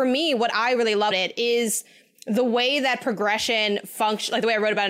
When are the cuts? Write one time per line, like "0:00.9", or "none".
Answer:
0:01.1